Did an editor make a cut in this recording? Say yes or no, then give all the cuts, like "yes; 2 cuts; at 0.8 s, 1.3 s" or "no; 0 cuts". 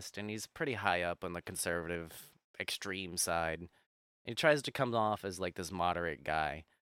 no; 0 cuts